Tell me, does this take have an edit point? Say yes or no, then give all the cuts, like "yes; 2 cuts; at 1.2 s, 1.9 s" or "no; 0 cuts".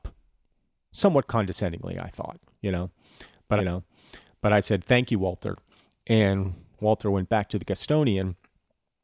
yes; 1 cut; at 3.6 s